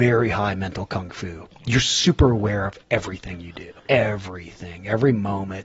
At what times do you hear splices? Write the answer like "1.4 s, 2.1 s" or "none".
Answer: 2.8 s, 3.8 s

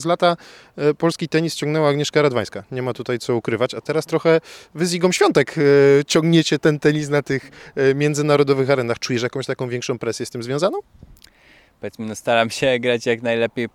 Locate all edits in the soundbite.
none

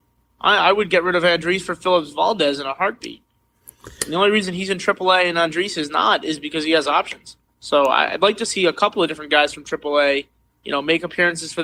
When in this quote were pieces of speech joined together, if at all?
7.4 s, 10.5 s

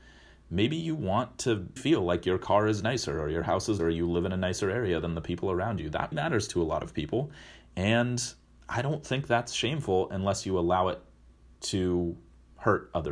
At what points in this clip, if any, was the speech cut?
1.8 s, 3.8 s, 6.1 s

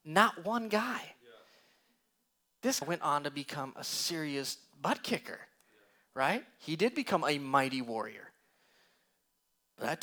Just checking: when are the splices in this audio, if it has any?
2.8 s

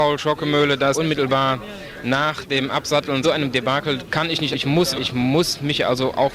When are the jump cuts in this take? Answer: 0.9 s, 3.2 s, 4.5 s, 4.9 s

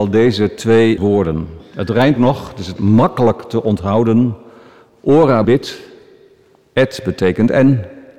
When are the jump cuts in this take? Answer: 1.0 s, 2.2 s, 2.8 s, 5.4 s

